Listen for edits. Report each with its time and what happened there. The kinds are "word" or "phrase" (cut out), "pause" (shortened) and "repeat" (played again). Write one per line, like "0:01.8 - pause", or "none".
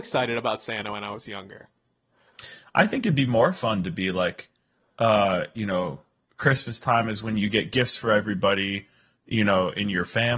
none